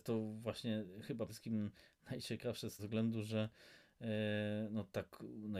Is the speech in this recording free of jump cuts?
no; 2 cuts; at 1.3 s, 2.8 s

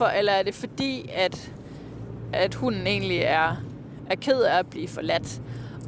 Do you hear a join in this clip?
no; 0 cuts

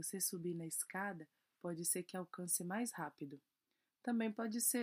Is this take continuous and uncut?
yes; 0 cuts

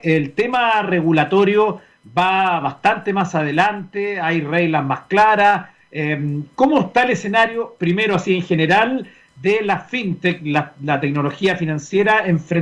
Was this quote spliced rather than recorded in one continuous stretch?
no; 0 cuts

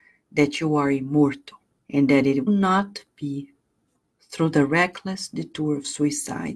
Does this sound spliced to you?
yes; 3 cuts; at 1.8 s, 2.5 s, 3.9 s

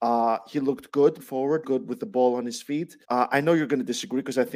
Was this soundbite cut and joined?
yes; 3 cuts; at 1.2 s, 1.6 s, 3.0 s

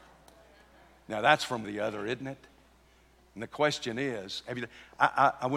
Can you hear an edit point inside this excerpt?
yes; 1 cut; at 1.6 s

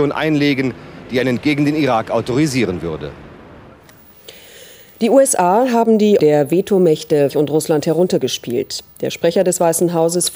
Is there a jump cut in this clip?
yes; 3 cuts; at 1.4 s, 6.2 s, 7.3 s

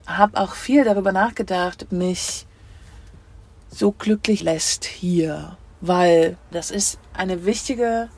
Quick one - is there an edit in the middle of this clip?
yes; 3 cuts; at 1.9 s, 4.4 s, 6.5 s

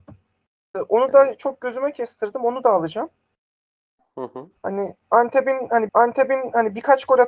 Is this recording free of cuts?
no; 2 cuts; at 4.6 s, 5.9 s

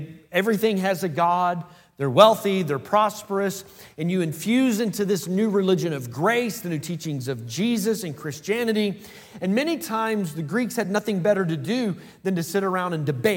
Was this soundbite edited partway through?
no; 0 cuts

